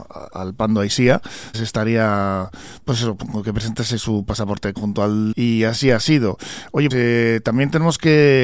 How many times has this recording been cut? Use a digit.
4